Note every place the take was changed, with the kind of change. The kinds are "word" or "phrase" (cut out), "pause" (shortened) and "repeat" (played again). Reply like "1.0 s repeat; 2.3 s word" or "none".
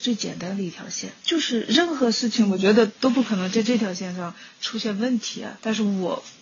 1.2 s pause